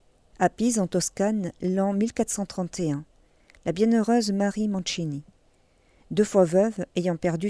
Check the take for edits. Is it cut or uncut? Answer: uncut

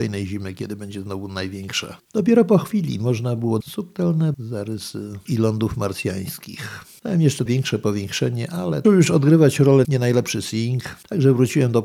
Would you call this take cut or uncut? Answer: cut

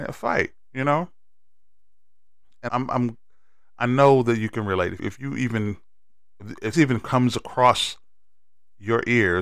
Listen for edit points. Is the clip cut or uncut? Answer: cut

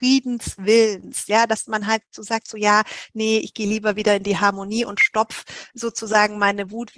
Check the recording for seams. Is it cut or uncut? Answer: uncut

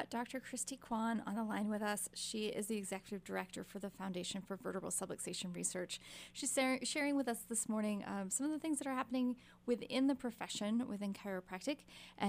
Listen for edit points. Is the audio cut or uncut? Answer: uncut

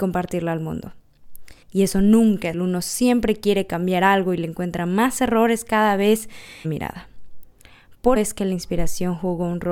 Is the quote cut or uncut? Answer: cut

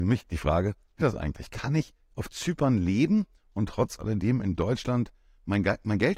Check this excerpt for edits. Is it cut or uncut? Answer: cut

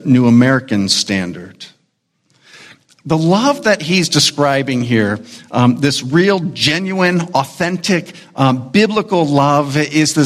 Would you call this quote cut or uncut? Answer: uncut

